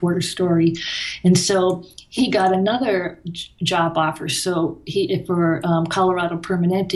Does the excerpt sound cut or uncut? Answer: cut